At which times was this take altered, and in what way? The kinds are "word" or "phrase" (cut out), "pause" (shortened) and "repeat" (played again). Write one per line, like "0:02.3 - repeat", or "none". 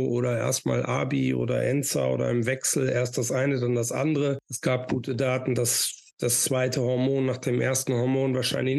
0:06.1 - pause